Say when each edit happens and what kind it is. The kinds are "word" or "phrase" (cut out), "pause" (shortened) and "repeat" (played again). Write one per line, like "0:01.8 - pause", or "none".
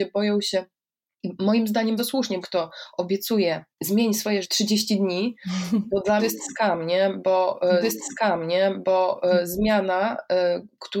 0:02.0 - word
0:02.4 - phrase
0:03.7 - pause
0:04.4 - word
0:06.2 - word
0:07.8 - repeat